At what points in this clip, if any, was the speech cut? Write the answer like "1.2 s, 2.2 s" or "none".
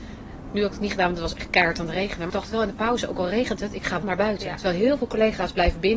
2.3 s, 4.0 s

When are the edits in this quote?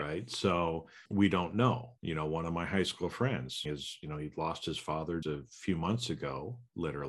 1.1 s, 2.0 s, 3.7 s, 5.2 s

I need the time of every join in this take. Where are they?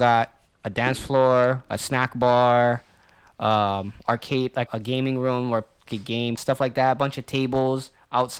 4.7 s, 5.9 s, 6.4 s

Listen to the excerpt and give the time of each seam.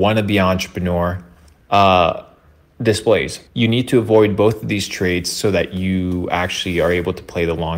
3.5 s

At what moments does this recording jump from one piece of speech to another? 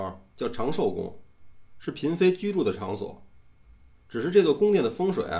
none

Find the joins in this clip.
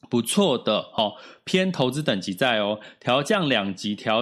none

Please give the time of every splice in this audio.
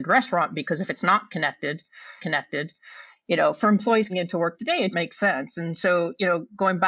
2.2 s, 4.1 s, 4.9 s

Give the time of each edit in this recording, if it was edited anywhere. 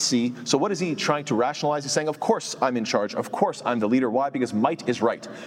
none

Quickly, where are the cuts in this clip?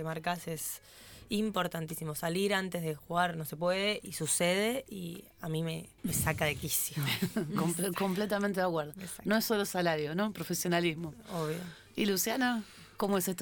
6.0 s

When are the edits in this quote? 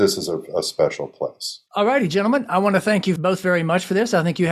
1.7 s

